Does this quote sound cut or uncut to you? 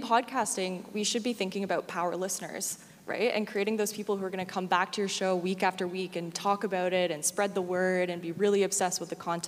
uncut